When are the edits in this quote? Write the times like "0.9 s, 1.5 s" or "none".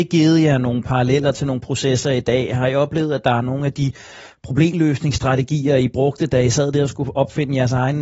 none

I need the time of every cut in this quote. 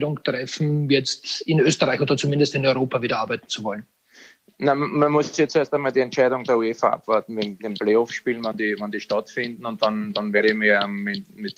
none

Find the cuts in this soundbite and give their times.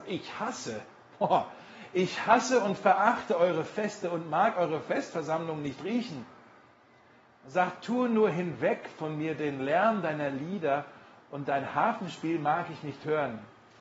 none

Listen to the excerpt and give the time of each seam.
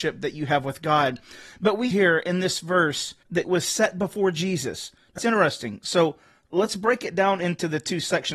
1.9 s, 3.4 s, 5.2 s

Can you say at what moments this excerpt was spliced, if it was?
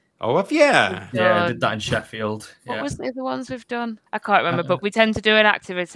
4.1 s

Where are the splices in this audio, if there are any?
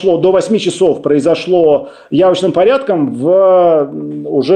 none

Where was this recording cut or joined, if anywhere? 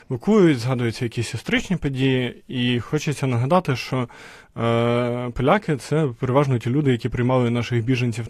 none

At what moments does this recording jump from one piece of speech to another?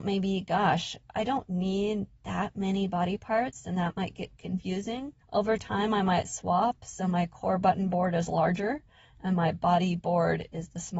5.2 s

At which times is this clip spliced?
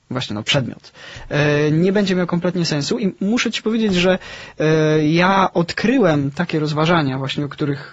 none

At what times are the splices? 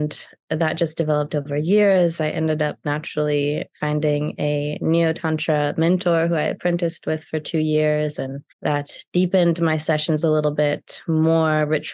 8.5 s

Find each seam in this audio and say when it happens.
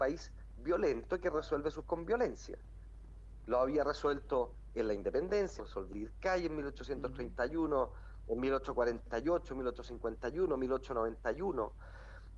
1.8 s, 5.6 s, 5.9 s

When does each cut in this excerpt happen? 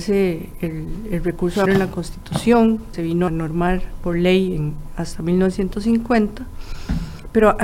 1.7 s, 2.9 s, 3.3 s

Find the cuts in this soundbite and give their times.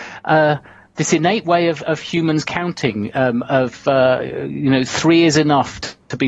none

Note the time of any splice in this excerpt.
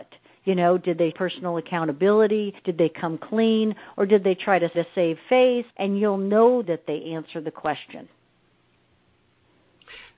1.1 s, 2.6 s, 4.7 s, 5.7 s, 6.6 s

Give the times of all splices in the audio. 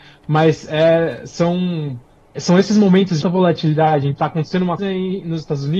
2.4 s, 3.2 s, 4.2 s, 4.8 s

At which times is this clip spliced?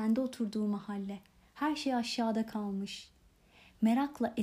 none

